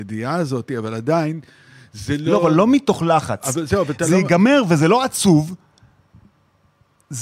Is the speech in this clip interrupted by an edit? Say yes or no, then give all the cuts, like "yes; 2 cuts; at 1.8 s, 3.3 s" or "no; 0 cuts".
no; 0 cuts